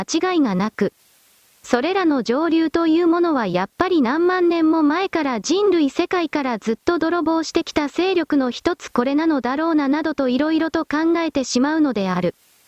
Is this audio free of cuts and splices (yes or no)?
no